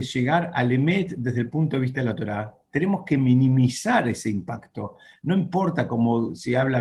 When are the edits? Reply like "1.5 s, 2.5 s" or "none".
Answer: none